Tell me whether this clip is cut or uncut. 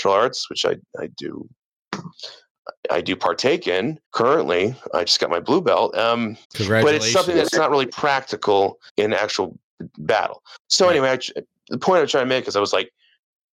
cut